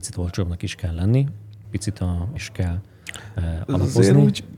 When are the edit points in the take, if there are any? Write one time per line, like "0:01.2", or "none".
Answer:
0:01.6
0:02.4